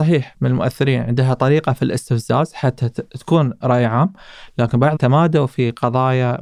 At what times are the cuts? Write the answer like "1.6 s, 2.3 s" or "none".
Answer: 5.0 s